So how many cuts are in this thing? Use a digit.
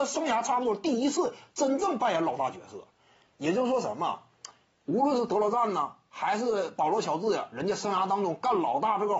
0